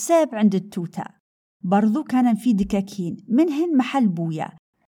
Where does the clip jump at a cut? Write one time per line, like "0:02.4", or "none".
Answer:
none